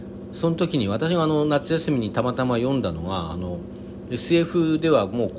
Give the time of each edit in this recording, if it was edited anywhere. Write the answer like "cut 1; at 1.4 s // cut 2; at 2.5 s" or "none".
none